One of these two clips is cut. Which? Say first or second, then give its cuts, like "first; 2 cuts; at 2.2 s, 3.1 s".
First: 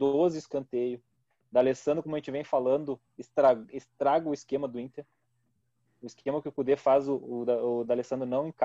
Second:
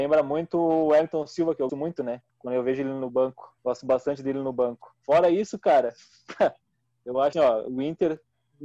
second; 4 cuts; at 1.7 s, 2.3 s, 3.6 s, 7.3 s